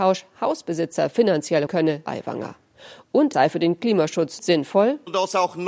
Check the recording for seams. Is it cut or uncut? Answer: cut